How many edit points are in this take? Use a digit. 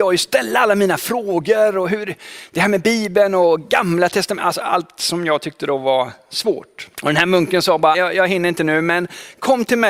2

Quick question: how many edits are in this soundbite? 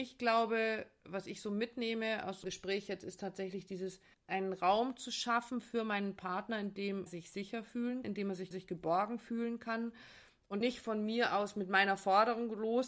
6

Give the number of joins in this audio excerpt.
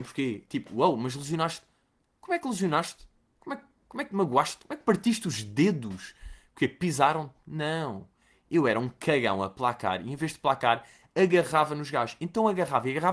0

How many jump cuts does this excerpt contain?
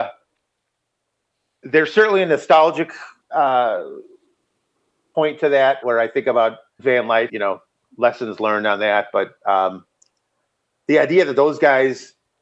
3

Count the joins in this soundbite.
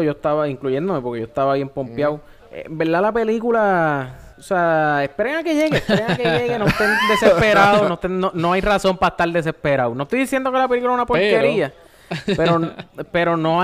2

